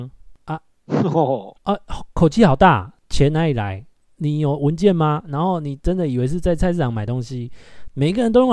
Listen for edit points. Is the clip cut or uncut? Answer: cut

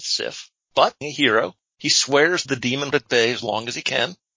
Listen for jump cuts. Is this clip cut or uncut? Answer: cut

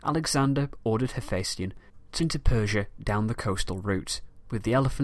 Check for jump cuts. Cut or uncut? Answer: cut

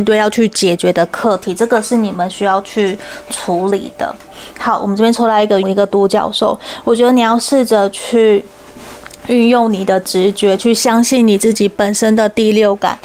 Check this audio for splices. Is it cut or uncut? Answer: cut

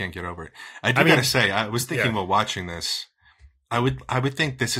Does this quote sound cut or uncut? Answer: uncut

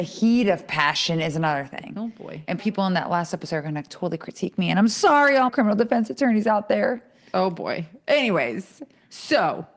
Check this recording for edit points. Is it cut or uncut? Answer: cut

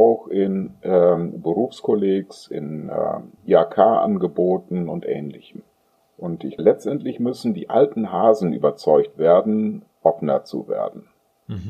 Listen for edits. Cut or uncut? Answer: cut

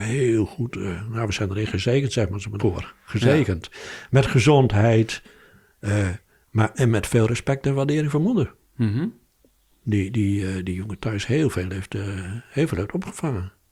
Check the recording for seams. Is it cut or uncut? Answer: cut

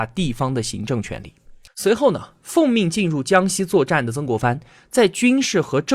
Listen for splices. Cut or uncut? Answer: cut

